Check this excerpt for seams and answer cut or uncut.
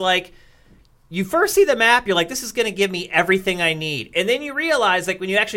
uncut